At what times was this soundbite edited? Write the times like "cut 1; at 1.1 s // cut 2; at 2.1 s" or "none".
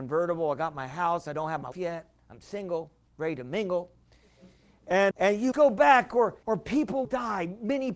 cut 1; at 1.7 s // cut 2; at 5.1 s // cut 3; at 5.5 s // cut 4; at 6.4 s // cut 5; at 7.0 s